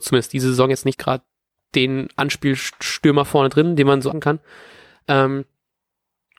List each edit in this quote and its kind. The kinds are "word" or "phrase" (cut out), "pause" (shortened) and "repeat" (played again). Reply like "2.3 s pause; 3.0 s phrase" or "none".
0.9 s word; 4.1 s word